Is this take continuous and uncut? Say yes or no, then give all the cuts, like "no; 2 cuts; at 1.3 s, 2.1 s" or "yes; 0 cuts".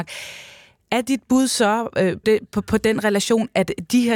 no; 1 cut; at 2.2 s